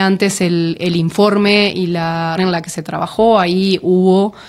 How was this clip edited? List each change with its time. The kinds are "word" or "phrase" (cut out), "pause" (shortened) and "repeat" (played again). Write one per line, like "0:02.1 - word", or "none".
0:02.4 - word